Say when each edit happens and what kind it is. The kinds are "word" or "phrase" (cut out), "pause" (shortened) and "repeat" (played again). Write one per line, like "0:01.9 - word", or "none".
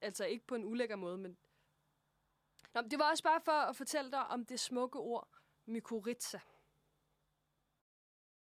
none